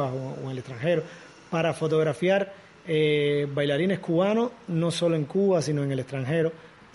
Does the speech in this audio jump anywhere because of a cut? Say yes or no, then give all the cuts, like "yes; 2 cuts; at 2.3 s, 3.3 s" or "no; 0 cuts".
no; 0 cuts